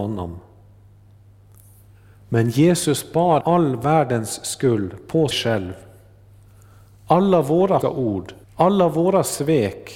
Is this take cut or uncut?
cut